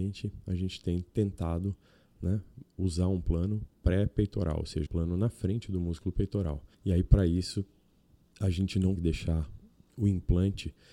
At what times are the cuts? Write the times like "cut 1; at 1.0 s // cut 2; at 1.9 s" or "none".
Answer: cut 1; at 4.9 s // cut 2; at 6.7 s // cut 3; at 9.0 s